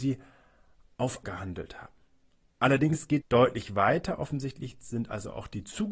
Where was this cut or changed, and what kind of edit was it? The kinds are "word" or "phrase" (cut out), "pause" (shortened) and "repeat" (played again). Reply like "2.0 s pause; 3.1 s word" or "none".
1.2 s word; 3.2 s word